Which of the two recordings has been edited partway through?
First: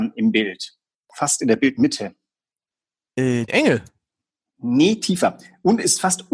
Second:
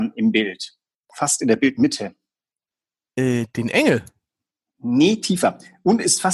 first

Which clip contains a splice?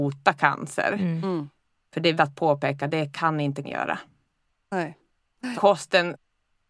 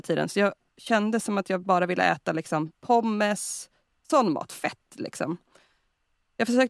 first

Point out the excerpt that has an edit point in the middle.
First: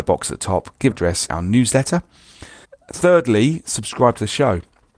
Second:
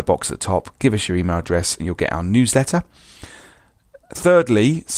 first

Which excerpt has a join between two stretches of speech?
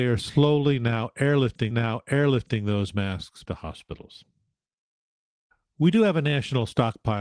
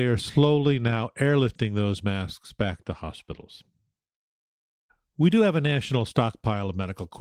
first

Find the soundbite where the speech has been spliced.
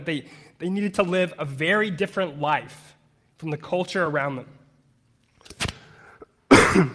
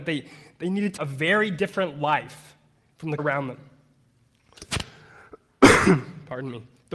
second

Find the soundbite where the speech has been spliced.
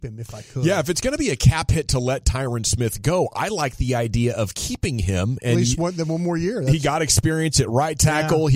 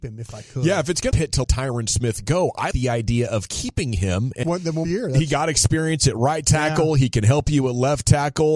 second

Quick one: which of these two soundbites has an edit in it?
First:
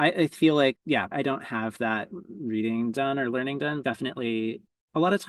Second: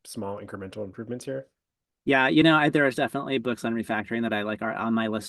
first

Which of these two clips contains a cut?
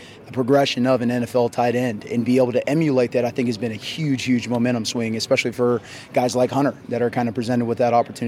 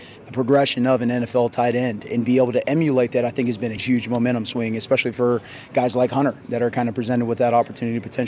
second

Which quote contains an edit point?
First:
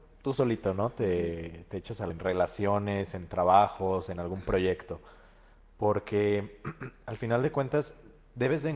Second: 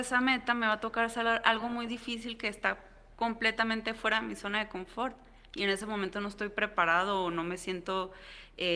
first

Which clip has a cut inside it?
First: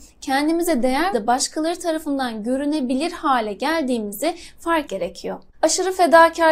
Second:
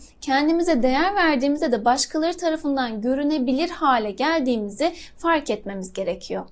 first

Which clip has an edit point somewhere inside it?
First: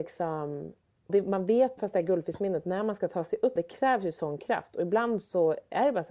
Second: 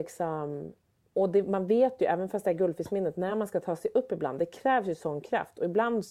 first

